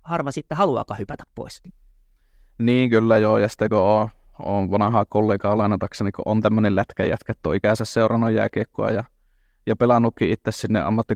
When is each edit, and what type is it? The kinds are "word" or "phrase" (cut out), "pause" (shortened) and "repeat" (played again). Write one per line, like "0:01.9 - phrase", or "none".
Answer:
none